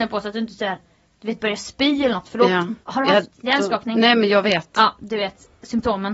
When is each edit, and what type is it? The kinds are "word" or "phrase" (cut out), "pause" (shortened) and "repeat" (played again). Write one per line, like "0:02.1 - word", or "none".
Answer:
0:02.8 - pause